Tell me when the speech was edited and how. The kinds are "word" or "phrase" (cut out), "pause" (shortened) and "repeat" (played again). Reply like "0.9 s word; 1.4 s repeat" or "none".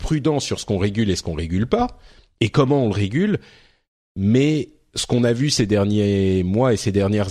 none